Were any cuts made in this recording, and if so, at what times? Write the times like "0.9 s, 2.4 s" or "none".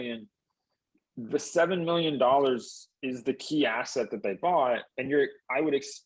4.9 s